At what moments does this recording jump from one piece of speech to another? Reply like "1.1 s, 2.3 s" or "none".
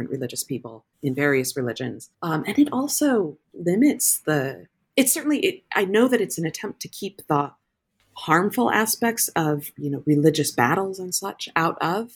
0.9 s, 2.1 s, 3.4 s